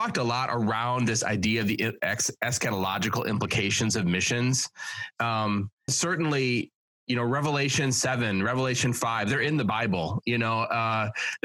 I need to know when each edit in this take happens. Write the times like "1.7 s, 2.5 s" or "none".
5.9 s